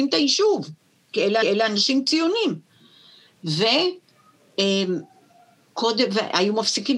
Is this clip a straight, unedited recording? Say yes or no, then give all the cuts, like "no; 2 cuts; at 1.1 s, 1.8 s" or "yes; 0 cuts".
no; 2 cuts; at 1.0 s, 1.4 s